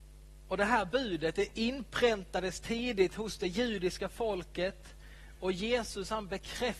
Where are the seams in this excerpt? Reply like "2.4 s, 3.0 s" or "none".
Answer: none

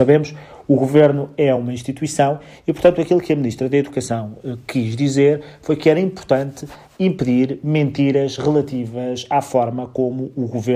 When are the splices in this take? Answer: none

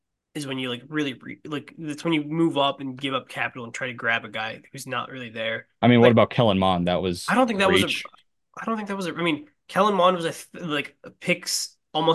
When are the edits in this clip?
5.7 s

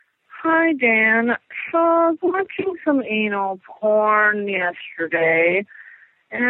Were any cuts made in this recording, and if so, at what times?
none

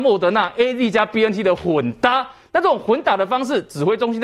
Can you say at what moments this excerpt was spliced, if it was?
none

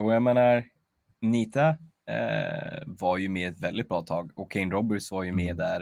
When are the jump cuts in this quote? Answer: none

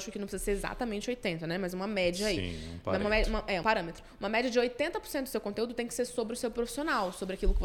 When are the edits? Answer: 3.6 s

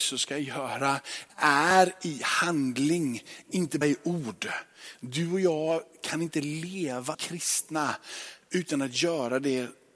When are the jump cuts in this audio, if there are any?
1.3 s, 3.8 s, 7.1 s

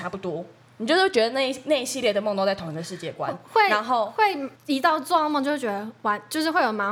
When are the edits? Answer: 4.5 s

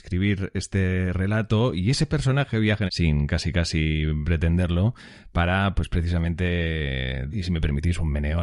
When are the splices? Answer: 2.9 s, 7.3 s

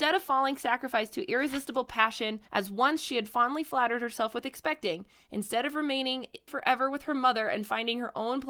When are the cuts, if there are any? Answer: 2.4 s, 6.5 s

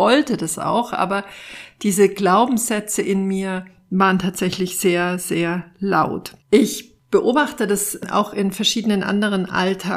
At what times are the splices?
6.4 s

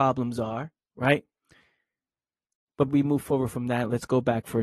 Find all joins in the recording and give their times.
2.9 s

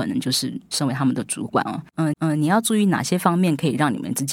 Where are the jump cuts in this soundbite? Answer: 2.1 s

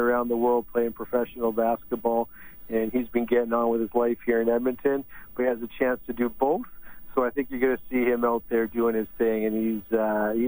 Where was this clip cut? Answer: 5.4 s

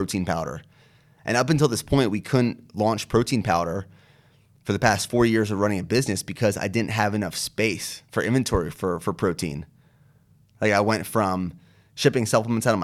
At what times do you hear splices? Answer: 8.1 s

